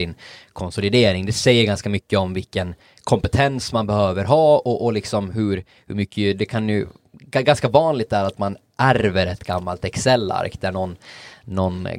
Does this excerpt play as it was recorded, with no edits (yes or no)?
yes